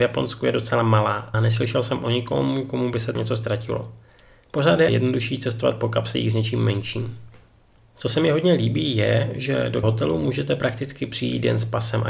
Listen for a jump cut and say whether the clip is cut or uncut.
cut